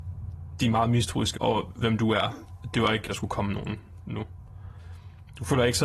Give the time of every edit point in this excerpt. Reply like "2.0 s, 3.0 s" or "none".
1.3 s, 3.1 s